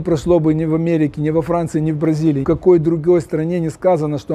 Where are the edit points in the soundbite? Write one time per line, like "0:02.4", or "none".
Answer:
0:02.4